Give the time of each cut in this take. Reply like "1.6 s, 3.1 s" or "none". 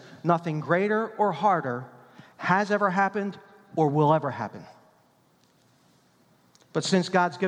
none